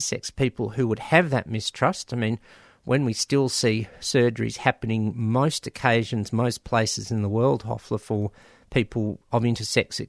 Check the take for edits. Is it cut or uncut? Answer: uncut